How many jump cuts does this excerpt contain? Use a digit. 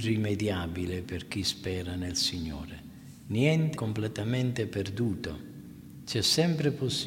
1